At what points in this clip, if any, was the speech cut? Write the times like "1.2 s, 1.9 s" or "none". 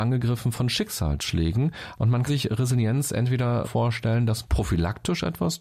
2.3 s, 3.6 s, 4.4 s